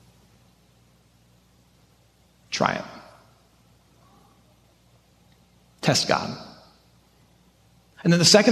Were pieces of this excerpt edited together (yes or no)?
no